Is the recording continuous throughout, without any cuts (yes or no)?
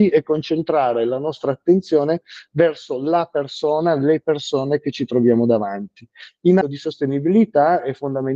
no